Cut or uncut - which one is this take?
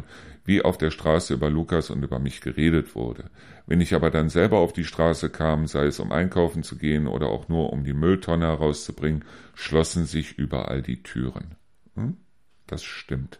uncut